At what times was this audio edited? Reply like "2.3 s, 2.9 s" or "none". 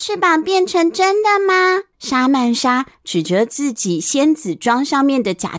1.9 s